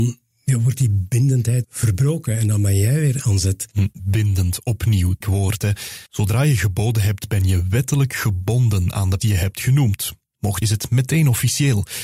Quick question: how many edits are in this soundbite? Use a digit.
6